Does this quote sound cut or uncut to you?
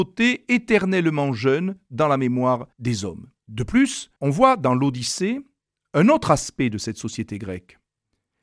cut